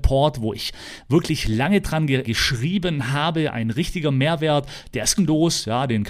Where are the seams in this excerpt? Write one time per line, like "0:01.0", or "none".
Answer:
0:02.2
0:05.2